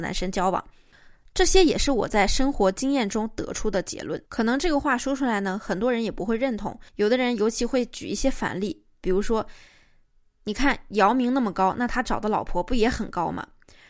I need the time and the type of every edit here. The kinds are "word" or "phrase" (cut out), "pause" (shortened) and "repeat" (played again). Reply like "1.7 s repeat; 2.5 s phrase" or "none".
4.3 s pause; 6.9 s pause